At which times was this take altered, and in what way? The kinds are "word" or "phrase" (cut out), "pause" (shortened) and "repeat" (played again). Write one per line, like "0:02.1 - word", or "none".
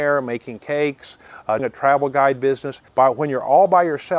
0:01.6 - word
0:02.9 - pause